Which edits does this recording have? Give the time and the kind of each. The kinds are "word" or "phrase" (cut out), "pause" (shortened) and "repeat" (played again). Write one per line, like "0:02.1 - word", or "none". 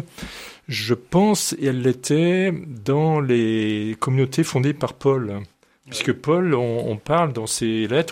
none